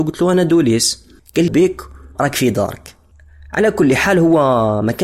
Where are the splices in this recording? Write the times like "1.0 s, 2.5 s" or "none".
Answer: 1.5 s, 2.1 s

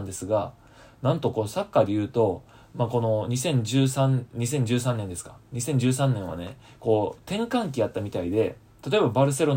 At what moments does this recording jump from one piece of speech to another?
none

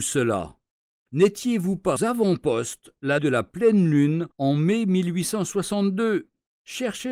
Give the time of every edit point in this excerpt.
1.1 s, 2.0 s, 3.2 s, 4.3 s

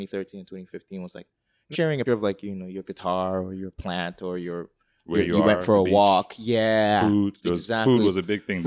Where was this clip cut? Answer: 1.7 s, 2.1 s

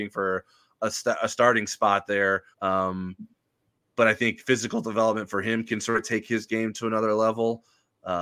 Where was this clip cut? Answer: 2.5 s

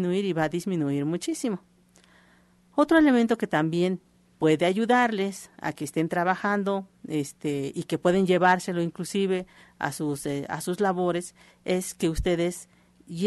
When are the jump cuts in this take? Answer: none

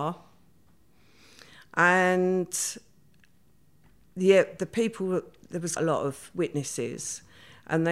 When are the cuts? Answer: 5.8 s

